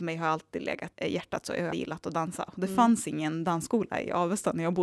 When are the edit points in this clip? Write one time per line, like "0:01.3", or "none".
0:00.9
0:01.7